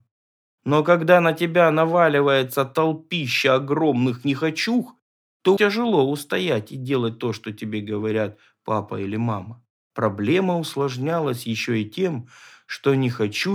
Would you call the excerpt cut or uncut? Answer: cut